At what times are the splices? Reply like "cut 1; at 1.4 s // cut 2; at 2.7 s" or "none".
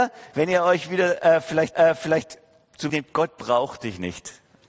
cut 1; at 1.7 s // cut 2; at 2.9 s